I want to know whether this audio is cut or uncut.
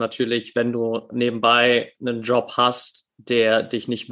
uncut